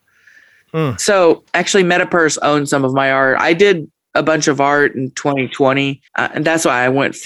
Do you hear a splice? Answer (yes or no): yes